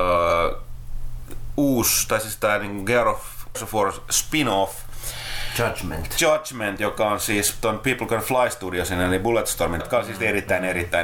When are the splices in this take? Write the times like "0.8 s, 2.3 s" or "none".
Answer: 3.5 s, 9.8 s